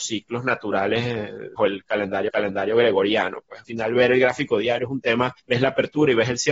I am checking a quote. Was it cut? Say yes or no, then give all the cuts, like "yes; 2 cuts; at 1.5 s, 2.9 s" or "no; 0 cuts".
yes; 4 cuts; at 1.6 s, 2.3 s, 3.6 s, 5.4 s